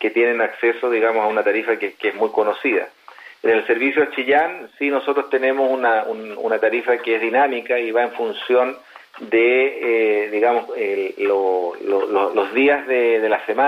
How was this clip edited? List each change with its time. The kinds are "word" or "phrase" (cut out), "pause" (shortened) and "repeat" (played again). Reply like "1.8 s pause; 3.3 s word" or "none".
none